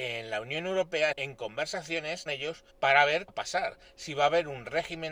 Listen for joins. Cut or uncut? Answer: cut